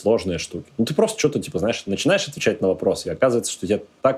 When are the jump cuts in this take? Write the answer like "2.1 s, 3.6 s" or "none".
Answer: none